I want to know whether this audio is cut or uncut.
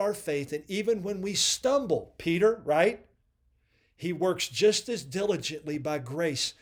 uncut